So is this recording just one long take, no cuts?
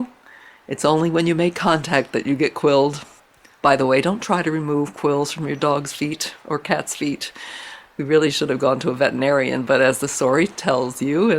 yes; 0 cuts

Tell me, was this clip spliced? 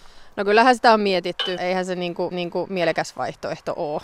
yes; 2 cuts; at 1.6 s, 2.3 s

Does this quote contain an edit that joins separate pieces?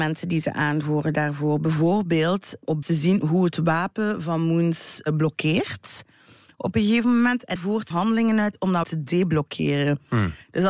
yes; 4 cuts; at 2.8 s, 7.6 s, 7.9 s, 8.8 s

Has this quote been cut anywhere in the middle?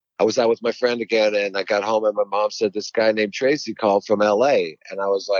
no; 0 cuts

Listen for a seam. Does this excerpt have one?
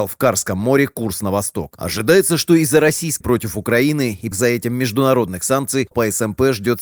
yes; 3 cuts; at 3.2 s, 4.3 s, 5.9 s

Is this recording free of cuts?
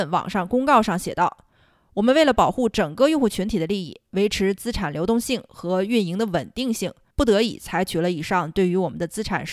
no; 1 cut; at 7.1 s

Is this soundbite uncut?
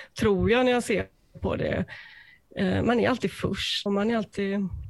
no; 1 cut; at 3.9 s

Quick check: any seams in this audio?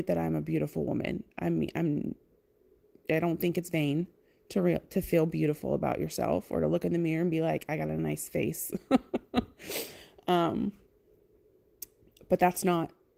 no; 0 cuts

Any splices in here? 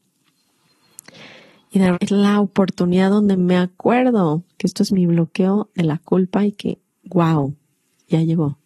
yes; 1 cut; at 1.9 s

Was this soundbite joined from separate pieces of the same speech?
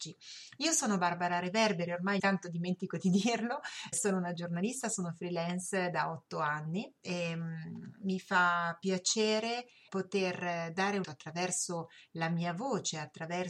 yes; 4 cuts; at 2.2 s, 3.9 s, 9.9 s, 11.0 s

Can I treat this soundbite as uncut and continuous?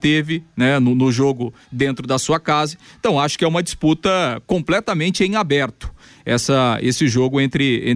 yes; 0 cuts

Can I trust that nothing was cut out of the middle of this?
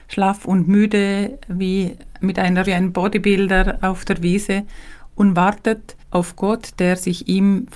no; 2 cuts; at 2.7 s, 6.0 s

